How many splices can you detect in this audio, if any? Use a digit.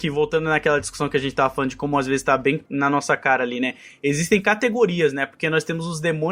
1